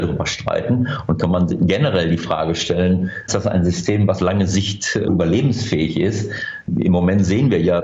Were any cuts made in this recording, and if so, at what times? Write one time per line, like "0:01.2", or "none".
0:03.3
0:04.2
0:05.1